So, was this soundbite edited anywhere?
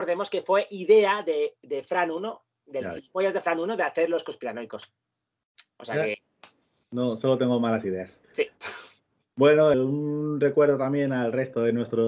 yes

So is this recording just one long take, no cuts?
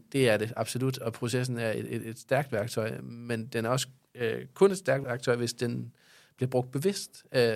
yes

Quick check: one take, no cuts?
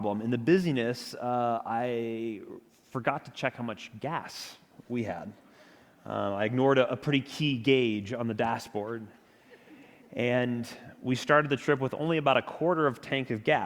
yes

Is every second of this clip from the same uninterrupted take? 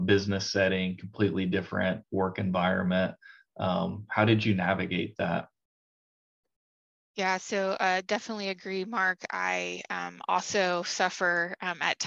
yes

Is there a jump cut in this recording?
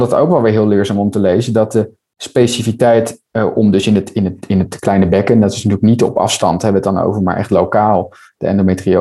no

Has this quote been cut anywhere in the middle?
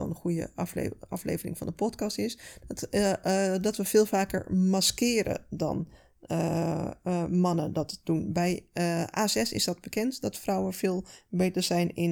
no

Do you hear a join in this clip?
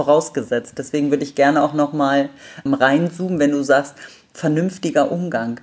yes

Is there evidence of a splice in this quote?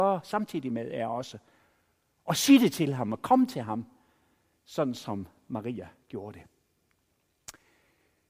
no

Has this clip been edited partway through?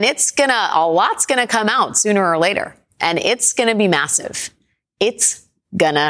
no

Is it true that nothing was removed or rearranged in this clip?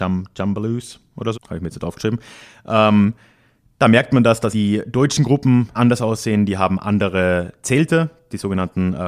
no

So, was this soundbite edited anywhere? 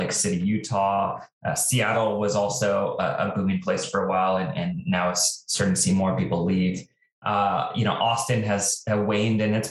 no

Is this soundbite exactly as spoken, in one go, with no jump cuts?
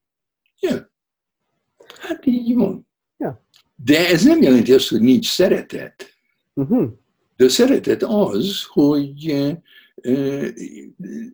yes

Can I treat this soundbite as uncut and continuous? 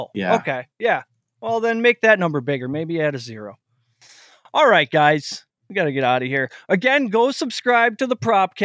yes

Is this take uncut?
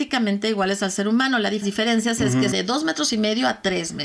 no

